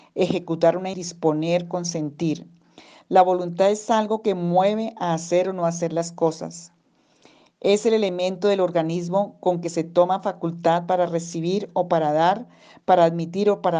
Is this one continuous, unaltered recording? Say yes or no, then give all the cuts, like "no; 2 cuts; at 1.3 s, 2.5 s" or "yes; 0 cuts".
no; 1 cut; at 0.9 s